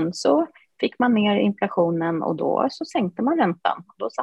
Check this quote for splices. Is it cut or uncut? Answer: uncut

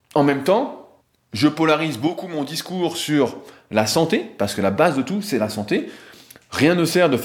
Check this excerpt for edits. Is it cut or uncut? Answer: cut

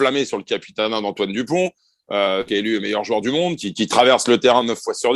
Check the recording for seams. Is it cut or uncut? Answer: cut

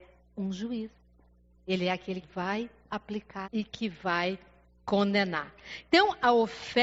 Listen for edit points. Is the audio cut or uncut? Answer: cut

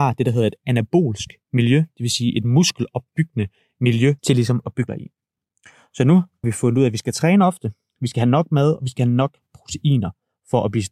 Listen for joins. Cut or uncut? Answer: cut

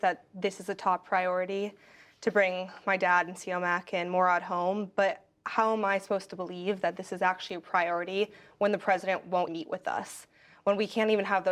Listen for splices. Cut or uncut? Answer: cut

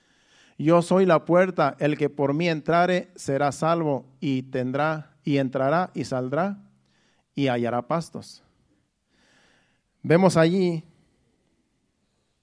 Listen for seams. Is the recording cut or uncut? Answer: uncut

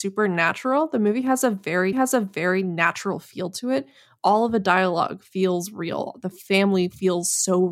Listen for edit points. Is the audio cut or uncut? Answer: cut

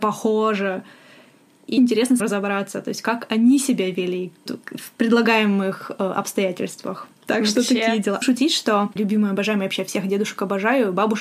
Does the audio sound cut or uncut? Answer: cut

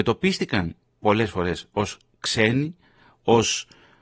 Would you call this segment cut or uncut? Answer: uncut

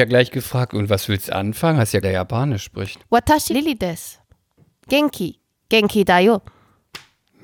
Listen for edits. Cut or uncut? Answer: cut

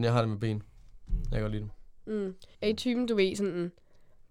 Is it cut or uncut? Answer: cut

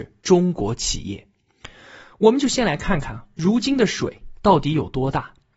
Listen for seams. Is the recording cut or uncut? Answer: uncut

